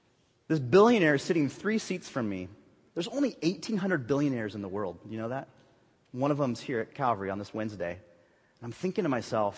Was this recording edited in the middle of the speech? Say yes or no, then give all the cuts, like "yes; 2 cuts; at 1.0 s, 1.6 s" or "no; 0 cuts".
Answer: no; 0 cuts